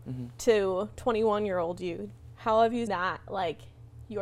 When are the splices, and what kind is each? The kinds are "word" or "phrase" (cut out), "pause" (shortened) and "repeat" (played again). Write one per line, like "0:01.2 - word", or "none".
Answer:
0:02.9 - word